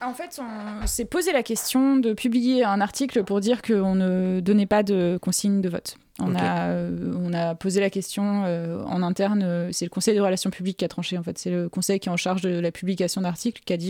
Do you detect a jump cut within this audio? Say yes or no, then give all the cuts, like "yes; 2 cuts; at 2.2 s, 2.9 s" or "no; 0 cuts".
no; 0 cuts